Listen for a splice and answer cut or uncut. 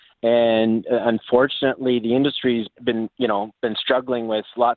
cut